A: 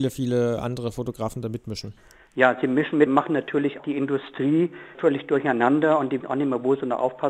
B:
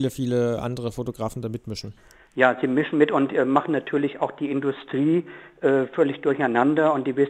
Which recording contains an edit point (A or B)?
A